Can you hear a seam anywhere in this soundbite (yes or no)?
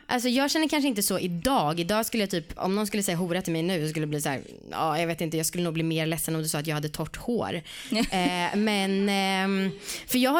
no